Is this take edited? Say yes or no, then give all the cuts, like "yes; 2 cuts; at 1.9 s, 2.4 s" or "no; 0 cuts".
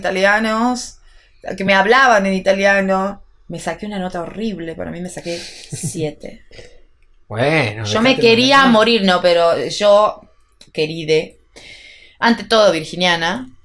no; 0 cuts